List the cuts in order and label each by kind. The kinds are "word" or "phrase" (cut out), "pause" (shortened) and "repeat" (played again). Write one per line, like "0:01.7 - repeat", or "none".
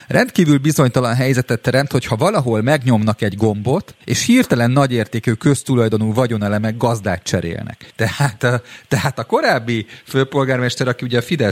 0:04.0 - pause
0:07.9 - pause